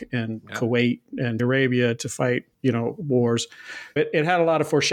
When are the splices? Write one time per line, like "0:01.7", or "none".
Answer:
0:01.4
0:02.5
0:04.0